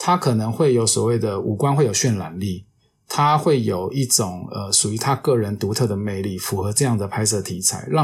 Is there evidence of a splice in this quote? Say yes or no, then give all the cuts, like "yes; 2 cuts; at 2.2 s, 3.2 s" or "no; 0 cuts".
no; 0 cuts